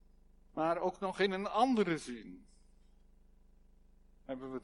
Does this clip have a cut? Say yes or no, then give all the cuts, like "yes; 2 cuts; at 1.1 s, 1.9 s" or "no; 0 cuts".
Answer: no; 0 cuts